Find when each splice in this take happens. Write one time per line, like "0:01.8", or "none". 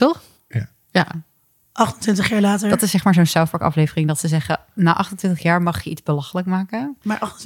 none